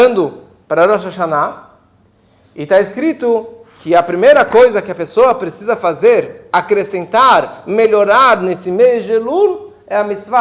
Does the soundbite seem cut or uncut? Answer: uncut